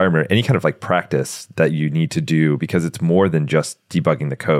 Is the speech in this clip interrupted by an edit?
no; 0 cuts

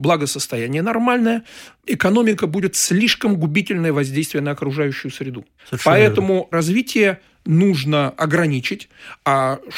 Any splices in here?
yes; 2 cuts; at 2.7 s, 6.5 s

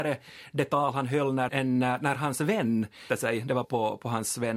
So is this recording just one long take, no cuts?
no; 3 cuts; at 1.5 s, 3.1 s, 3.6 s

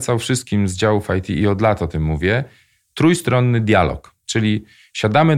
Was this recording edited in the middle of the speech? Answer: no; 0 cuts

